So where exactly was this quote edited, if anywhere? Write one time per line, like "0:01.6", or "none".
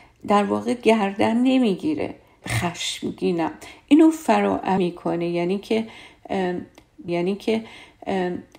0:02.4
0:04.8
0:07.1